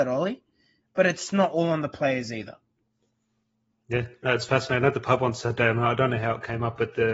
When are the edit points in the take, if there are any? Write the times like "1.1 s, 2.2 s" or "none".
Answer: none